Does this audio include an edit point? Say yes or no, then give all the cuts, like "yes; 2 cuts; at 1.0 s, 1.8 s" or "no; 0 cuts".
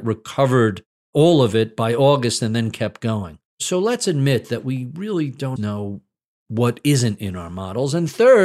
yes; 2 cuts; at 3.5 s, 5.6 s